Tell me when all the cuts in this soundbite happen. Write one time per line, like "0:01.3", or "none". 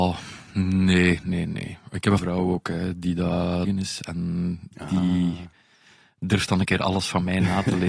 0:01.2
0:02.2
0:03.6